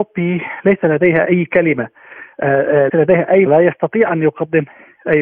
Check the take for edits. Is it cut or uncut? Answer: cut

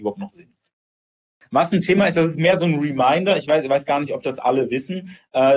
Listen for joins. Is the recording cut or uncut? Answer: uncut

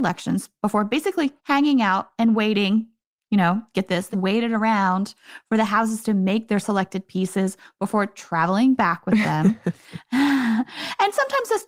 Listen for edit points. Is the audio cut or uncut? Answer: cut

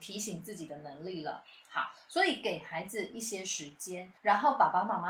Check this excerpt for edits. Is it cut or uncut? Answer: cut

